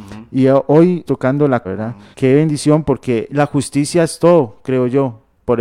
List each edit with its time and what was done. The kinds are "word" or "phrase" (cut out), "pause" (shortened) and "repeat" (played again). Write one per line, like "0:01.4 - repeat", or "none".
0:01.1 - word
0:01.6 - phrase
0:02.1 - pause
0:03.3 - phrase

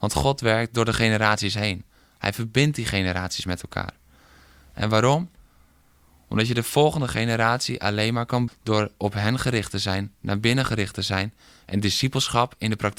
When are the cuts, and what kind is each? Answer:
0:08.5 - word

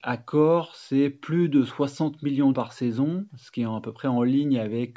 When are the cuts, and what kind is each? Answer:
0:02.5 - word

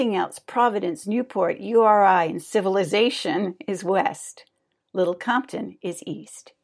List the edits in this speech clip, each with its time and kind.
none

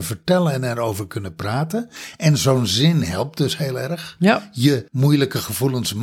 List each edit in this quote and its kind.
0:04.9 - pause

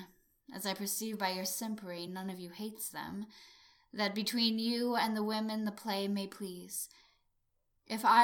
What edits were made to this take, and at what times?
none

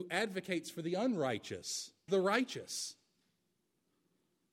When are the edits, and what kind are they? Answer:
0:02.1 - word

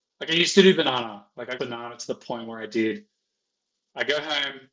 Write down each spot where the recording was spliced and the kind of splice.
0:01.6 - word

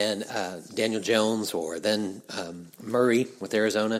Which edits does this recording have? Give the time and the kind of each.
0:02.7 - pause

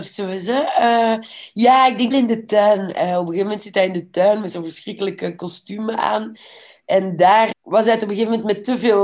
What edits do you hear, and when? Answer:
0:02.1 - word
0:07.5 - word

